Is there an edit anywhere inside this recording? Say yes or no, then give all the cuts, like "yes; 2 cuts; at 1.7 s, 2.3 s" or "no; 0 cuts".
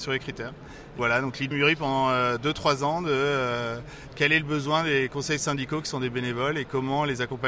yes; 2 cuts; at 1.0 s, 1.5 s